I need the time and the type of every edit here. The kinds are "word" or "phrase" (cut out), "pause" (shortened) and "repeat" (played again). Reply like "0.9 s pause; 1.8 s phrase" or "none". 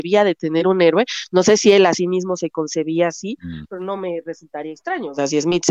none